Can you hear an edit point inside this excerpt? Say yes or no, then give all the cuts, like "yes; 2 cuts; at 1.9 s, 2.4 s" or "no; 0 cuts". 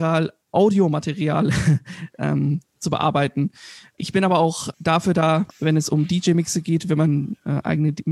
yes; 2 cuts; at 4.7 s, 5.5 s